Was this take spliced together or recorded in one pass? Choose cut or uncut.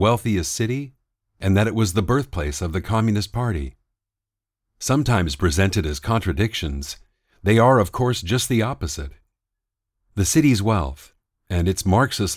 uncut